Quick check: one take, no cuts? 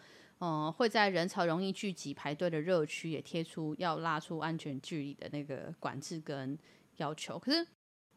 yes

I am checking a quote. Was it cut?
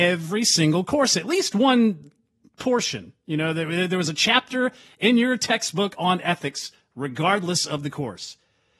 no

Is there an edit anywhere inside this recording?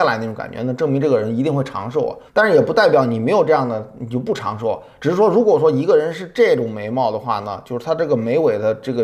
yes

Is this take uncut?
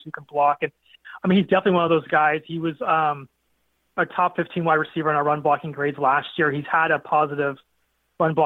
yes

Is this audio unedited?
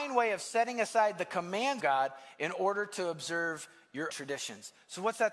no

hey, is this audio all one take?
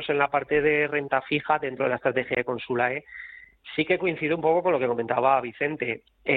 yes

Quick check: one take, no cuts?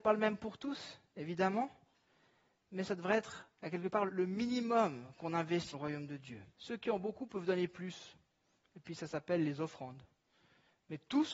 no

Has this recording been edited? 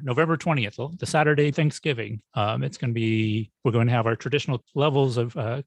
yes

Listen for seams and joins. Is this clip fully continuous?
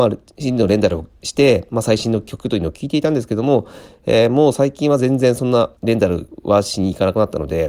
no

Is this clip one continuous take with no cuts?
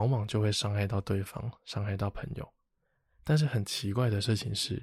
yes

